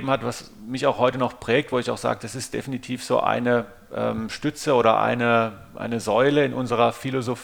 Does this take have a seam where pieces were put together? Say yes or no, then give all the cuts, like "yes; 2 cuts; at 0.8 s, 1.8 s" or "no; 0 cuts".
no; 0 cuts